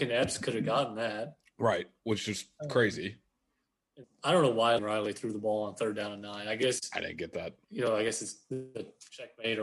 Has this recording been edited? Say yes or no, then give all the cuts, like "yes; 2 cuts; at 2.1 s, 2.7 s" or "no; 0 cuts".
yes; 3 cuts; at 4.0 s, 4.8 s, 7.6 s